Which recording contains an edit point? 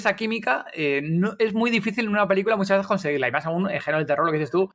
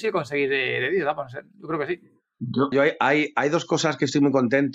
second; 1 cut; at 2.7 s

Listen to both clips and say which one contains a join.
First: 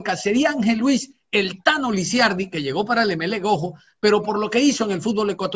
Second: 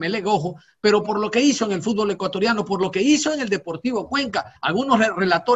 second; 1 cut; at 4.6 s

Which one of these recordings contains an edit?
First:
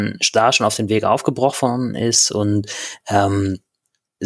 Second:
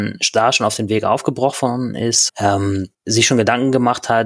second; 2 cuts; at 2.3 s, 2.9 s

